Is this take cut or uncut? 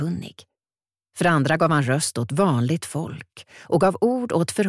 uncut